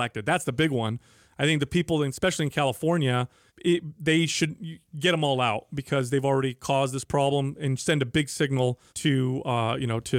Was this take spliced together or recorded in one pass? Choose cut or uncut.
cut